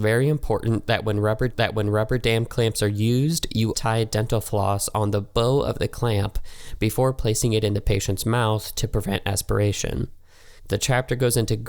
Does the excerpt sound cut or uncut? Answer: cut